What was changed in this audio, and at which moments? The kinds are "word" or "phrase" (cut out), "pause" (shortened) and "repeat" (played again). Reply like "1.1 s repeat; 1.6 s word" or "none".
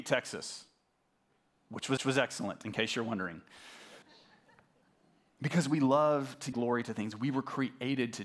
2.0 s repeat; 4.0 s pause; 6.5 s word